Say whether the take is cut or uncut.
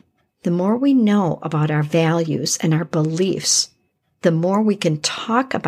uncut